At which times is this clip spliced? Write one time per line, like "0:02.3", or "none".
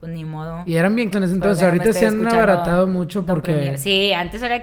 0:01.1